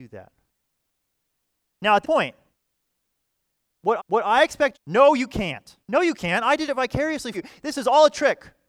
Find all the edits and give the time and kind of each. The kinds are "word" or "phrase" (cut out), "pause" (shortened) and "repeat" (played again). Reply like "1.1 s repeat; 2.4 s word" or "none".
2.0 s word; 4.0 s repeat; 4.7 s phrase; 5.8 s pause; 7.3 s word